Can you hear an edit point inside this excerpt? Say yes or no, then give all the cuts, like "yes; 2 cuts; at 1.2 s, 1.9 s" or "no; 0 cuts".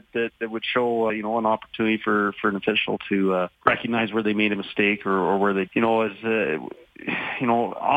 yes; 3 cuts; at 1.1 s, 3.5 s, 5.7 s